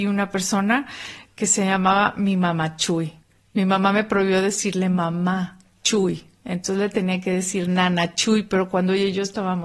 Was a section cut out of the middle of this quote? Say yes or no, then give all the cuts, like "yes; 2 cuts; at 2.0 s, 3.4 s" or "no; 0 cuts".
no; 0 cuts